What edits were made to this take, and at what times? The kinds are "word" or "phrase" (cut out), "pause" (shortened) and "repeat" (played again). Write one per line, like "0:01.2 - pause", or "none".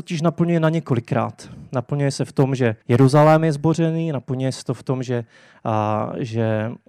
0:02.8 - pause